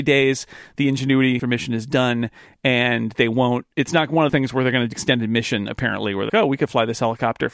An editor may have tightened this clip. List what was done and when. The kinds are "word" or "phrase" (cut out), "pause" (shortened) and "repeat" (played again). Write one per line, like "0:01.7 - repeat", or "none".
0:01.4 - word
0:04.3 - word
0:04.9 - word
0:06.3 - word

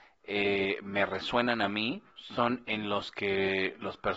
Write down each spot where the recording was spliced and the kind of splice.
0:02.1 - pause

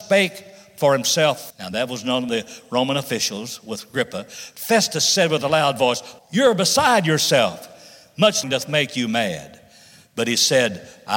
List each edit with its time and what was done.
0:01.5 - word
0:02.3 - word
0:06.2 - word
0:08.4 - word

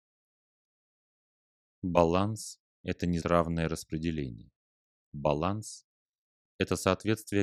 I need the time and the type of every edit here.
0:03.2 - word

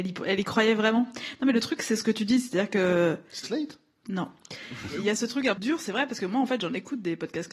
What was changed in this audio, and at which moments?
0:03.4 - word
0:05.6 - word

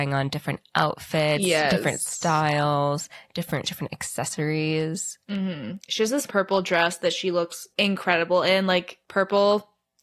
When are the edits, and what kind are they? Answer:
0:03.6 - word
0:06.3 - word
0:07.7 - pause
0:09.0 - pause

